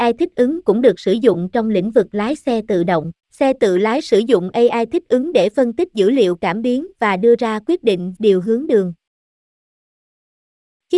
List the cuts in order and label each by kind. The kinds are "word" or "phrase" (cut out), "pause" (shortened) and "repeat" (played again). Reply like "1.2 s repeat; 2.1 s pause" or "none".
3.2 s pause; 8.2 s phrase

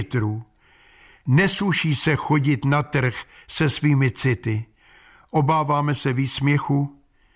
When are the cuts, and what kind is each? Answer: none

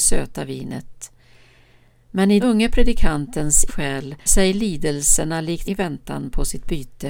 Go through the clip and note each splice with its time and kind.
2.4 s word; 3.7 s word; 4.3 s word; 5.6 s word

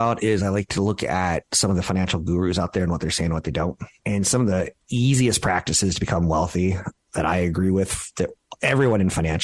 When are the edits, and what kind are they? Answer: 4.0 s pause

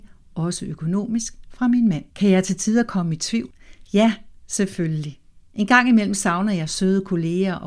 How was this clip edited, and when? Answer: 2.1 s pause

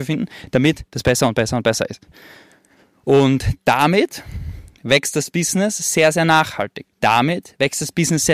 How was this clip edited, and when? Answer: 6.9 s pause

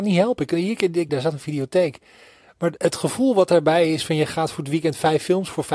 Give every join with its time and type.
1.1 s phrase; 2.8 s word

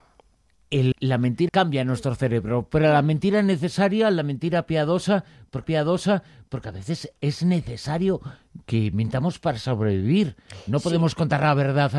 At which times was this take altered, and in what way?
0.9 s word; 1.5 s word; 5.6 s repeat

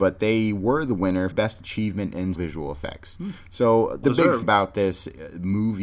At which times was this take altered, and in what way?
1.3 s word; 2.3 s word; 4.0 s word; 4.4 s word

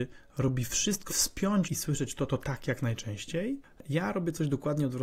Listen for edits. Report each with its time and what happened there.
1.1 s word; 1.6 s phrase; 2.3 s word

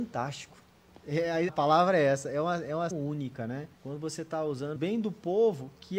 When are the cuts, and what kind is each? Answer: 1.5 s word; 2.9 s word; 3.7 s pause; 4.8 s word

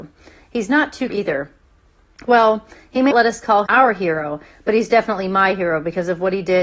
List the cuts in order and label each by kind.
1.1 s phrase; 3.1 s word; 3.7 s word

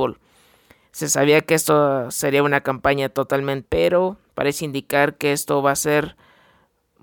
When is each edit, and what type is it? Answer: 3.7 s word

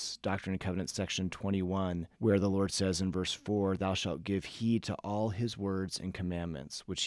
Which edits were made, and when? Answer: 2.1 s pause

